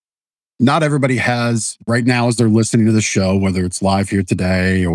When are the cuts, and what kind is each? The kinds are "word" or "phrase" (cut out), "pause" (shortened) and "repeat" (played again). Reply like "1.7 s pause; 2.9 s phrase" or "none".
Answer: none